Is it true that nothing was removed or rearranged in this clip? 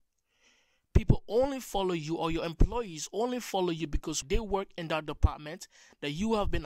no; 1 cut; at 4.2 s

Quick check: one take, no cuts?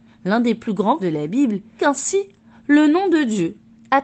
no; 2 cuts; at 1.0 s, 1.8 s

